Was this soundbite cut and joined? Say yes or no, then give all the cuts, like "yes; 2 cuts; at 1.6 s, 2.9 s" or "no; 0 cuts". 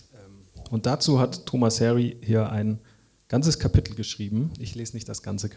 no; 0 cuts